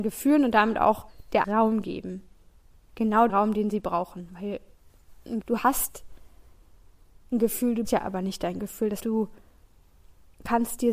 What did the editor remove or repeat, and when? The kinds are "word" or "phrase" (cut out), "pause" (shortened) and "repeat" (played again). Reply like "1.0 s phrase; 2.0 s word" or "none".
1.4 s word; 3.3 s word; 5.4 s word; 7.8 s word; 9.0 s word